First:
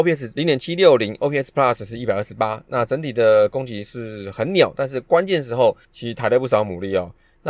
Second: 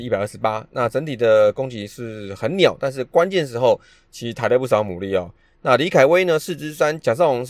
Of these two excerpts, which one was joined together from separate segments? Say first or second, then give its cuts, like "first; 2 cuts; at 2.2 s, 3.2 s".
first; 1 cut; at 5.8 s